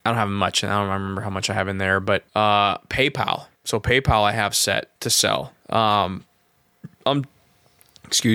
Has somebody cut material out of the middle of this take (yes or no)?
yes